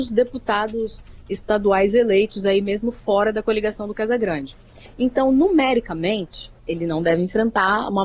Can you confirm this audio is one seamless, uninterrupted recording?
no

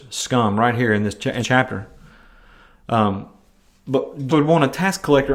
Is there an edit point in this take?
yes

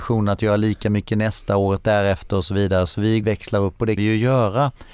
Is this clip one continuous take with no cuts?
no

